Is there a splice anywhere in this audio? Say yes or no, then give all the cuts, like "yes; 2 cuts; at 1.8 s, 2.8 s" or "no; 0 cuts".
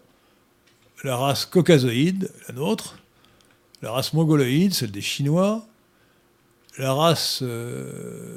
no; 0 cuts